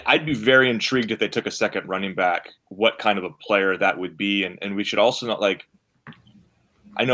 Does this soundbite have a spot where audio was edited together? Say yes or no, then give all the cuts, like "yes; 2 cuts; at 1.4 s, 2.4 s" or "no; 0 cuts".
yes; 1 cut; at 2.6 s